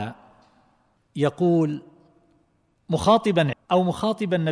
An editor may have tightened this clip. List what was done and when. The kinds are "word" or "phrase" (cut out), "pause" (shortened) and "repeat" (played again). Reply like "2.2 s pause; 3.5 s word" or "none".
3.5 s word